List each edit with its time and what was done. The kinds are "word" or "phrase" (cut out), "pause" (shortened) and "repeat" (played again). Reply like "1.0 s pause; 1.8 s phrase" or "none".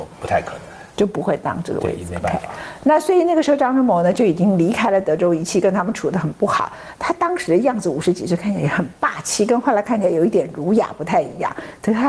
0.9 s pause